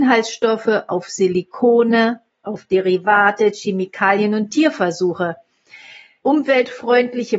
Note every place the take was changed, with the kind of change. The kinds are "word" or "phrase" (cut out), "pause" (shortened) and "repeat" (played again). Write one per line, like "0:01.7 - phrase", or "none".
none